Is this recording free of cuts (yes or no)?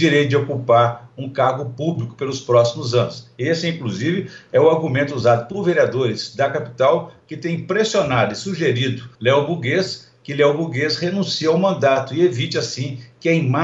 no